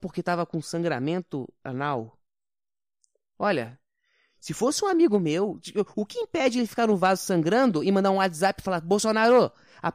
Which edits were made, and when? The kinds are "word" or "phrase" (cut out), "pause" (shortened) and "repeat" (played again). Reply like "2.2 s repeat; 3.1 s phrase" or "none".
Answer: none